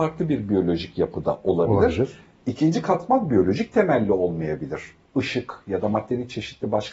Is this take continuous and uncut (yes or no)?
yes